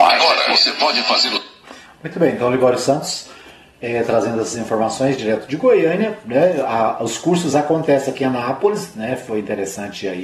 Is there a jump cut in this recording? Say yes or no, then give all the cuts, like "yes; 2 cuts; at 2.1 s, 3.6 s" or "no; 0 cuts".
no; 0 cuts